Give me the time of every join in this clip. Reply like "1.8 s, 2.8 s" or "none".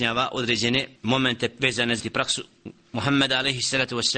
1.0 s, 2.0 s